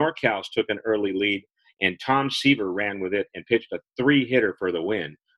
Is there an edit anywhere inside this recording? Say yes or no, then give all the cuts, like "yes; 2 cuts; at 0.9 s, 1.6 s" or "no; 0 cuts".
no; 0 cuts